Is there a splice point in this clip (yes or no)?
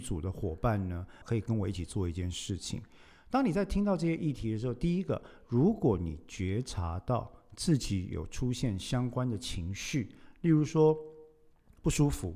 yes